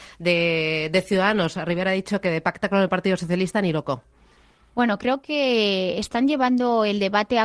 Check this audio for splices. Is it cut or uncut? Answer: uncut